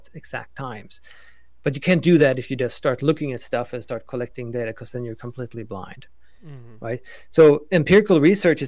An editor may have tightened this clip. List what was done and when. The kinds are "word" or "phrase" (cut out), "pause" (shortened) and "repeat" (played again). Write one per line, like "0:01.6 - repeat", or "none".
none